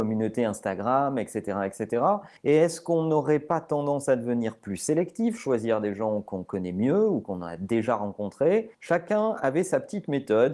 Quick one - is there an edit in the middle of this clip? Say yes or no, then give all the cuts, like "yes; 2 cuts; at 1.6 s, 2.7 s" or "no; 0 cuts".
yes; 2 cuts; at 2.4 s, 8.7 s